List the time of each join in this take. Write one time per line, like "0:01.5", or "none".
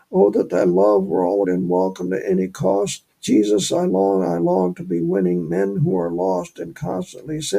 0:01.4
0:03.1